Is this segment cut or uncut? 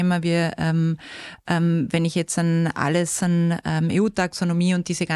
uncut